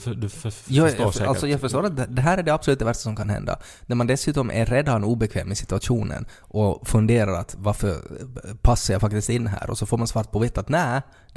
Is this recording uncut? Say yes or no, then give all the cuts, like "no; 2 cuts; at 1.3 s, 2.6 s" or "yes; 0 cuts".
yes; 0 cuts